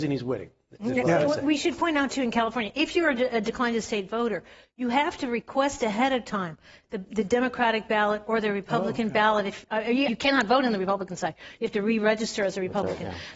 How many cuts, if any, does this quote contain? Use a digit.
1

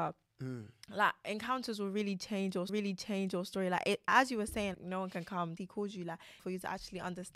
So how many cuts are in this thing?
5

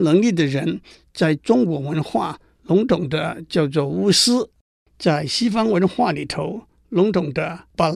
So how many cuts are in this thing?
0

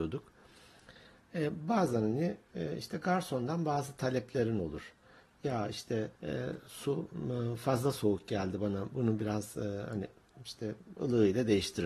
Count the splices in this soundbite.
1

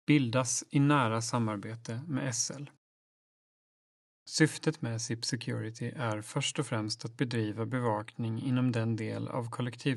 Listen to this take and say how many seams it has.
0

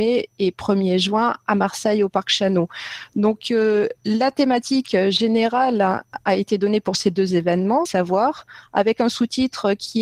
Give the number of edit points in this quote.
2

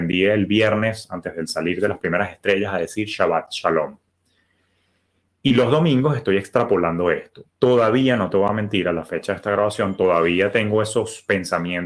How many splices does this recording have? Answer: 0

